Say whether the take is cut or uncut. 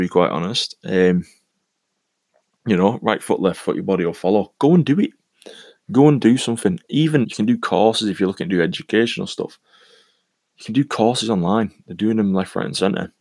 cut